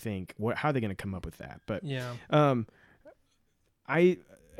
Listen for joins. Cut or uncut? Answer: uncut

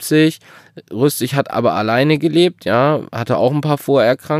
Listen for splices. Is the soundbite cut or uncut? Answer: uncut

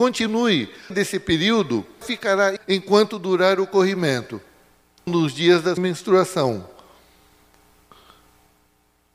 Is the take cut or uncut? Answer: cut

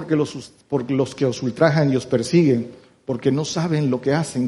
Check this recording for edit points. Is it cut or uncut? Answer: uncut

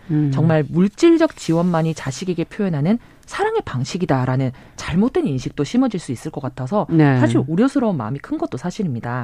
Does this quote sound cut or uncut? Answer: uncut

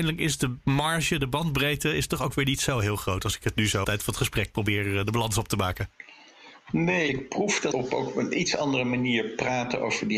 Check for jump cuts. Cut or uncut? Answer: cut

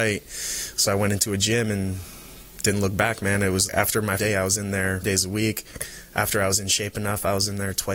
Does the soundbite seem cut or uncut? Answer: cut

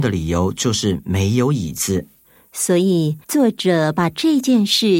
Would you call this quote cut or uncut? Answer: cut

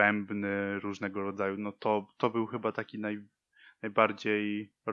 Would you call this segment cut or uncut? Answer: uncut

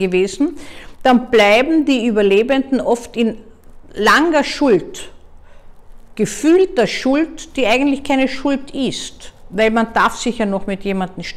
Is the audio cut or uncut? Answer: uncut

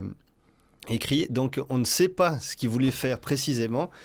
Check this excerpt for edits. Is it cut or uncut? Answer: uncut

